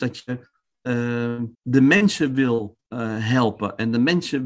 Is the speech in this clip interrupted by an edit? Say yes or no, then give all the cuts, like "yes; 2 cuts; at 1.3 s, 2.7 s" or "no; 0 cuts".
yes; 1 cut; at 1.5 s